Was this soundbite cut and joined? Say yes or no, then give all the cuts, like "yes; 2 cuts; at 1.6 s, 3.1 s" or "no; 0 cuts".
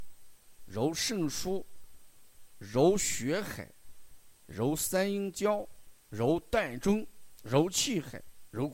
yes; 1 cut; at 6.0 s